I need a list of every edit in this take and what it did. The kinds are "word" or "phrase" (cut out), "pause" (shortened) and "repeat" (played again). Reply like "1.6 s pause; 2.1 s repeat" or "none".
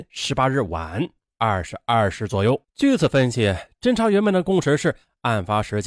2.7 s pause